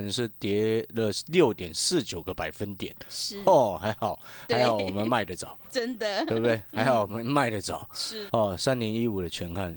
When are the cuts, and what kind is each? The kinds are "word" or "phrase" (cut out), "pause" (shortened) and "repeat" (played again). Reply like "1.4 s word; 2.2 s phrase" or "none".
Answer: 8.3 s word